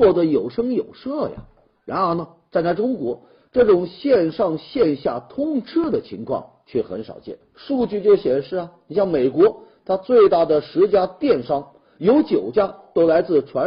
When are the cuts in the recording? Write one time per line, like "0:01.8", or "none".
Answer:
0:07.4